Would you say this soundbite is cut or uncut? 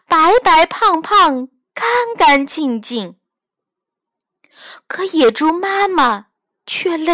uncut